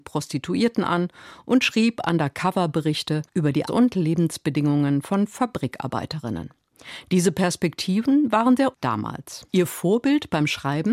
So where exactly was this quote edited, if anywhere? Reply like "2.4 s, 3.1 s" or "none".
3.3 s, 3.7 s, 8.7 s, 9.5 s